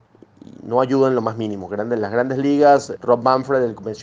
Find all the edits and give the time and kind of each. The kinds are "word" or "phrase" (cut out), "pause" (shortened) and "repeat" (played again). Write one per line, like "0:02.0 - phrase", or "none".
0:03.0 - word